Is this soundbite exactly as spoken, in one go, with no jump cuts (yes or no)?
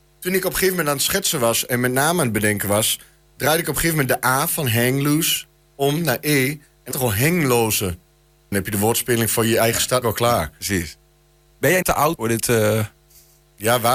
no